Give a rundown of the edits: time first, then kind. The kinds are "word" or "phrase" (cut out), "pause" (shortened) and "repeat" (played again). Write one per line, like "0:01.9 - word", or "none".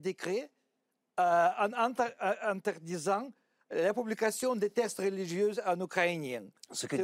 none

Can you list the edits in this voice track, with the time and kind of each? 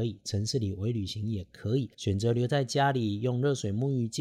0:01.9 - pause

